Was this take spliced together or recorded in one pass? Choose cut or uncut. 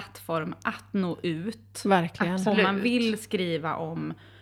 uncut